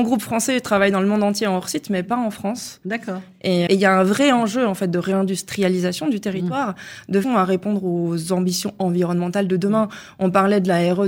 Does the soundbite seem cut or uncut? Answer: cut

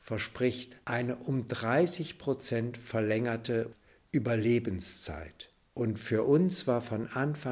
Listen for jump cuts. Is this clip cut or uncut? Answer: uncut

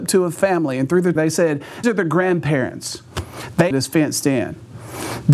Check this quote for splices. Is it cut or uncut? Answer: cut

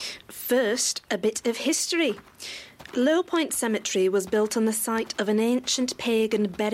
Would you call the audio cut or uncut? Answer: uncut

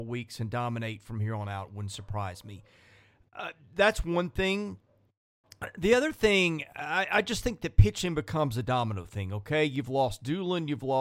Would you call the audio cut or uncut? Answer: uncut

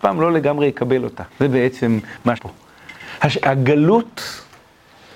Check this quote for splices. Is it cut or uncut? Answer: cut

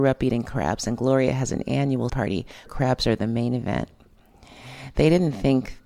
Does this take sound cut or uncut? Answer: cut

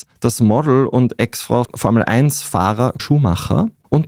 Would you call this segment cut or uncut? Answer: cut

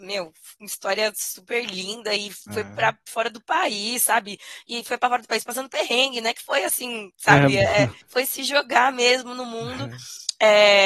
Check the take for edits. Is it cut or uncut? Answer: cut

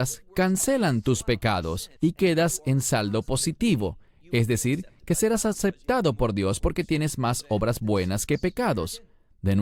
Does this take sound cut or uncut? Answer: cut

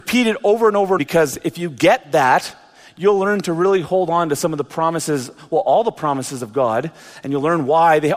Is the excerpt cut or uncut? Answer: cut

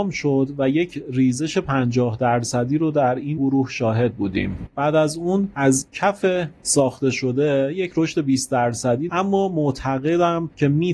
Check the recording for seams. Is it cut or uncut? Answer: cut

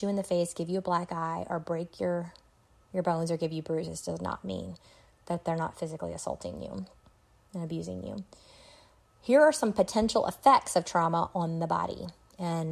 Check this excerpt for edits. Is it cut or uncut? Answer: uncut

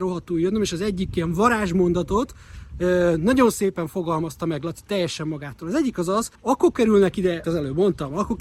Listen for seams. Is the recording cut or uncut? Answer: cut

